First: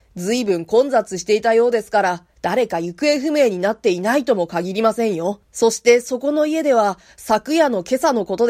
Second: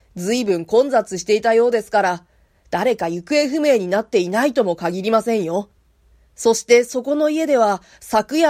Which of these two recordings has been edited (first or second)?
first